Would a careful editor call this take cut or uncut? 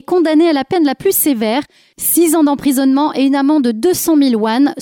uncut